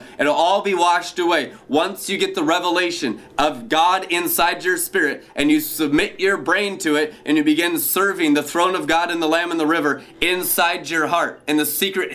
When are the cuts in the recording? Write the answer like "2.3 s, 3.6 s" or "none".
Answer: none